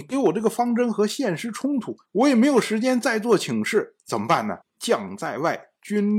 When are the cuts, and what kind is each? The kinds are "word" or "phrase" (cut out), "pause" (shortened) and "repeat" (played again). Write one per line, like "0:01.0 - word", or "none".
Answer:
0:02.0 - pause
0:04.6 - pause